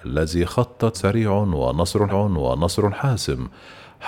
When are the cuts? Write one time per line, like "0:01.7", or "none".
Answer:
0:00.9
0:02.1